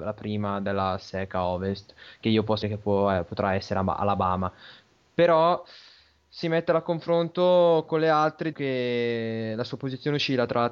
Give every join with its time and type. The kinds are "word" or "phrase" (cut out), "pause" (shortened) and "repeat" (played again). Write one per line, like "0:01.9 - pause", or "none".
0:02.6 - word
0:06.4 - word
0:08.5 - word